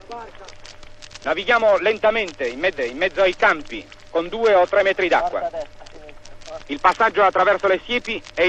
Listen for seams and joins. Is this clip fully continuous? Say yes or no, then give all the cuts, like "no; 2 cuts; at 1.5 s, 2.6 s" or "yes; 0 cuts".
no; 1 cut; at 2.8 s